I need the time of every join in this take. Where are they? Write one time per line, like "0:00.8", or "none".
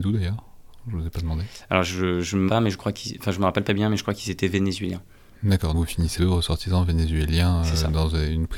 0:02.5
0:03.7
0:05.7
0:06.2